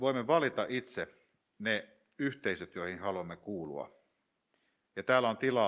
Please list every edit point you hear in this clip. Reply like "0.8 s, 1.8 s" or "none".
none